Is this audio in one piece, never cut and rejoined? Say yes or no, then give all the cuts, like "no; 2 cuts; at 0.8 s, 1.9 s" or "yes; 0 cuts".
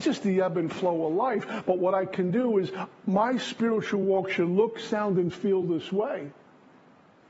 yes; 0 cuts